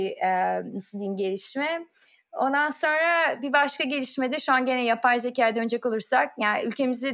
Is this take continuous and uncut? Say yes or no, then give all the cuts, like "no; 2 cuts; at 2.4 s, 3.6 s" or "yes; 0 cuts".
yes; 0 cuts